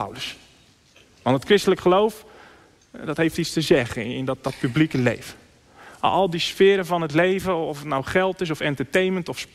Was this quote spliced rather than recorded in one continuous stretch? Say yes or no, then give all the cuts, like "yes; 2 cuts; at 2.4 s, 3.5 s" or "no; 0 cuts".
no; 0 cuts